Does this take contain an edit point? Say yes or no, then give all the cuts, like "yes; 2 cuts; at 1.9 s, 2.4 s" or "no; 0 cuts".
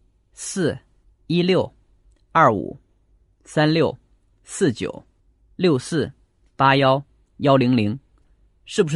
yes; 1 cut; at 1.0 s